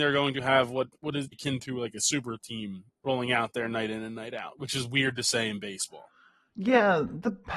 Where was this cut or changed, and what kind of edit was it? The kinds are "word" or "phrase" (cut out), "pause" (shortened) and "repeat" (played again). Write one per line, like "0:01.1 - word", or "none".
0:01.3 - phrase
0:03.0 - word